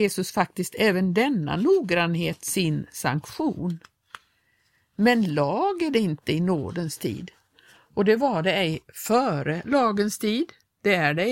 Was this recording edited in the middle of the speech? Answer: no; 0 cuts

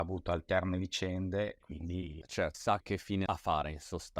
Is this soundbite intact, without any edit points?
no; 3 cuts; at 1.6 s, 2.5 s, 3.3 s

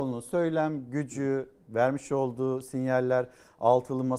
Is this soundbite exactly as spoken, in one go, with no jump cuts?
yes; 0 cuts

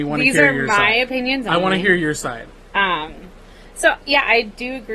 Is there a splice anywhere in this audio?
no; 0 cuts

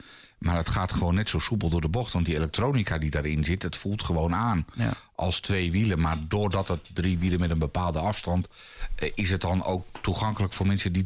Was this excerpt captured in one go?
yes; 0 cuts

